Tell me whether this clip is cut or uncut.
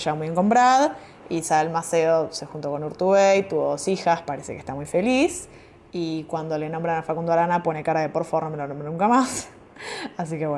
uncut